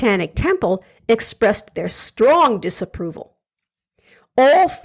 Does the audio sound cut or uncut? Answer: uncut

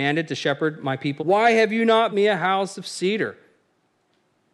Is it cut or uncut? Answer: cut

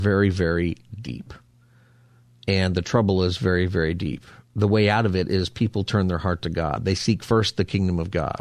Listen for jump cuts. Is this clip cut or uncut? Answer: uncut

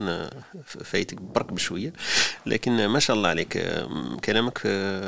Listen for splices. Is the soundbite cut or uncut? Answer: uncut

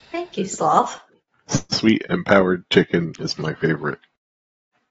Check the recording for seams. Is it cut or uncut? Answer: uncut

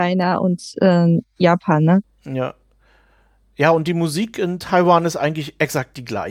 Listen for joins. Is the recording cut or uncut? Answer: uncut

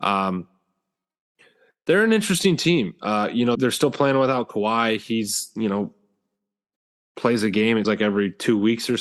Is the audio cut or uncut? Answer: cut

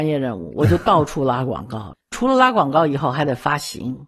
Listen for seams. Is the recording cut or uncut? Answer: cut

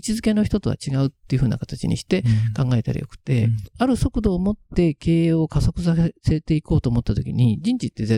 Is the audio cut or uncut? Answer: uncut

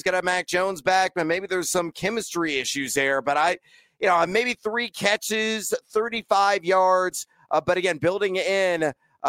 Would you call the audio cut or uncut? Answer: uncut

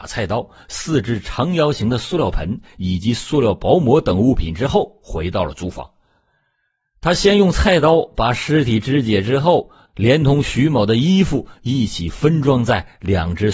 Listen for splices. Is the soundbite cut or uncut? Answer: uncut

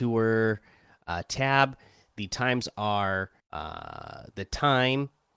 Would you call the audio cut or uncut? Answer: cut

